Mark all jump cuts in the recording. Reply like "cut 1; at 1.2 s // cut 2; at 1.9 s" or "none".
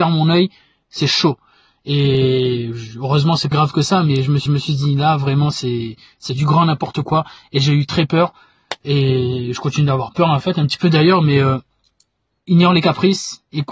cut 1; at 3.5 s // cut 2; at 4.5 s // cut 3; at 12.4 s